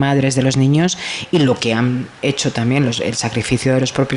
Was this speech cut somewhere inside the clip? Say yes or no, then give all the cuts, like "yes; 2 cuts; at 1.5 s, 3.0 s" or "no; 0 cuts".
no; 0 cuts